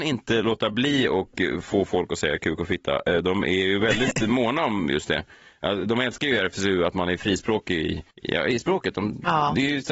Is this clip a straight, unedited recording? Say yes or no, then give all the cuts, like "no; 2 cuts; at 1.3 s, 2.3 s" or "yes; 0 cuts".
no; 1 cut; at 8.1 s